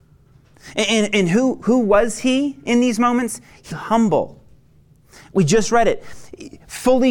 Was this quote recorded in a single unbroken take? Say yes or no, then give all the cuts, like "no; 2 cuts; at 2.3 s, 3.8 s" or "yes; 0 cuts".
no; 1 cut; at 3.7 s